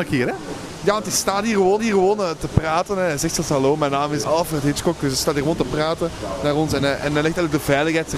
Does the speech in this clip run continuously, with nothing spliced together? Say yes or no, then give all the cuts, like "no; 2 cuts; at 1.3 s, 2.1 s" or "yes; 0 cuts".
no; 2 cuts; at 1.8 s, 4.2 s